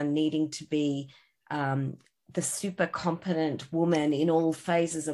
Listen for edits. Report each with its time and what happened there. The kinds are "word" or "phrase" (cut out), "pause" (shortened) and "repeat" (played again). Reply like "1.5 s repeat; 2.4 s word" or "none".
none